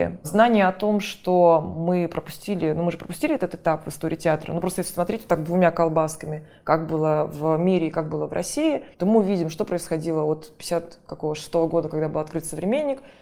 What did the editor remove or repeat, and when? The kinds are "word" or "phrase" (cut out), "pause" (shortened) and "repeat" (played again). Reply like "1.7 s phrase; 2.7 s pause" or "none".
8.9 s pause